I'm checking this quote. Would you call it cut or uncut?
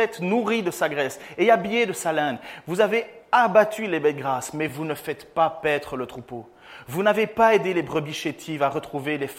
uncut